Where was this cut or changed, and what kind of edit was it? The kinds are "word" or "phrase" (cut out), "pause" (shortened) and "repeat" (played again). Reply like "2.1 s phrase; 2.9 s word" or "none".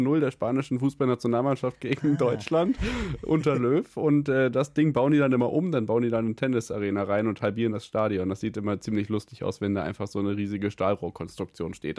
none